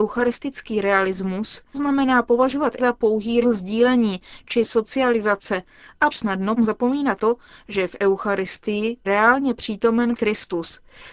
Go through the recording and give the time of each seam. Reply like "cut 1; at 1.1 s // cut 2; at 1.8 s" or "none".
cut 1; at 1.7 s // cut 2; at 2.8 s // cut 3; at 3.4 s // cut 4; at 6.1 s // cut 5; at 6.6 s // cut 6; at 7.2 s // cut 7; at 9.0 s // cut 8; at 10.1 s